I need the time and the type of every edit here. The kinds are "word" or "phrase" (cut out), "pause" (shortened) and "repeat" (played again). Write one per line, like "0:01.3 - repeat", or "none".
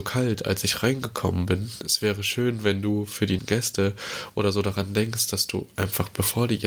0:03.4 - word